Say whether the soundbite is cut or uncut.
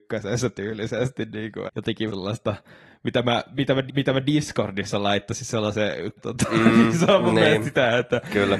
cut